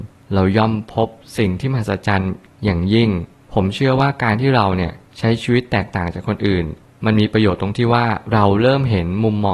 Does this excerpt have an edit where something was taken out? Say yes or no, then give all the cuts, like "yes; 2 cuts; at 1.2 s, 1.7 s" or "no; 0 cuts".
no; 0 cuts